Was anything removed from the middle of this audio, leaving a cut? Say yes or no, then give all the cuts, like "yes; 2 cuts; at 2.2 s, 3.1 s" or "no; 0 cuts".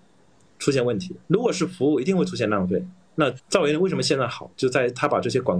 yes; 2 cuts; at 1.2 s, 3.4 s